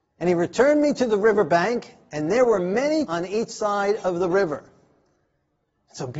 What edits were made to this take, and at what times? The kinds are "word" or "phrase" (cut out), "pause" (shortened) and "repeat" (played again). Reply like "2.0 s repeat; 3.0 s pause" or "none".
3.1 s word